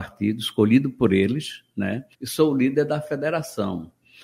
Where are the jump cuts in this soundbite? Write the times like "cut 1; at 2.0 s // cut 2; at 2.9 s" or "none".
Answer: cut 1; at 2.1 s